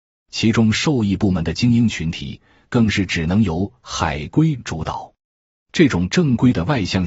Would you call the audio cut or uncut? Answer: uncut